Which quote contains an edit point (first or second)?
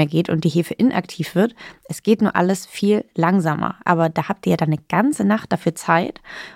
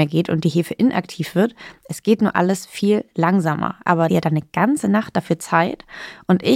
second